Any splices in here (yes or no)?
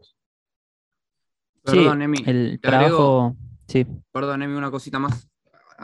yes